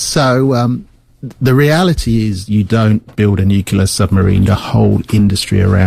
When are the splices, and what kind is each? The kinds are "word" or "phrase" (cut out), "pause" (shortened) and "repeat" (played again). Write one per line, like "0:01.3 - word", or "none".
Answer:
0:03.1 - word
0:04.5 - word